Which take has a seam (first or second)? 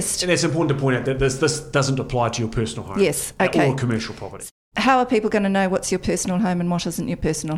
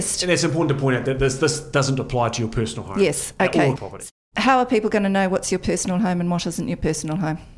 second